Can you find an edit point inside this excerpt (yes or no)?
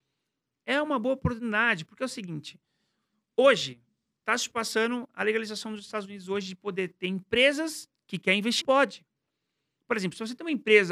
yes